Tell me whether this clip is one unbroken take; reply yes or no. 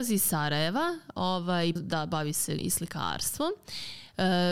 no